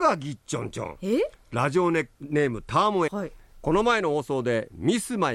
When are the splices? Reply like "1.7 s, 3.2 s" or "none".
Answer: 2.1 s, 3.1 s